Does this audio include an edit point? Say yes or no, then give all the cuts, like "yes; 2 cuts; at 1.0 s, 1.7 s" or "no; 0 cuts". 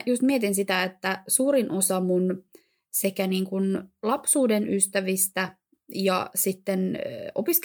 no; 0 cuts